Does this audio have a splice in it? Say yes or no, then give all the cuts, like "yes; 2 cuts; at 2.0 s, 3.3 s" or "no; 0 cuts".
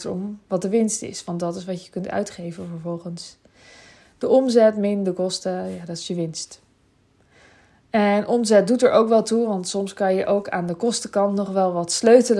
no; 0 cuts